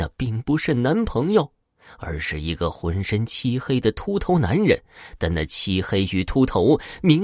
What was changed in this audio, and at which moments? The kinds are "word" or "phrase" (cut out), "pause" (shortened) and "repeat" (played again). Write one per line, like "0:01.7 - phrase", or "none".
none